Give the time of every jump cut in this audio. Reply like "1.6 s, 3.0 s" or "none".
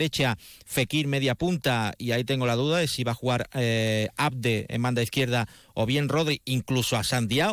none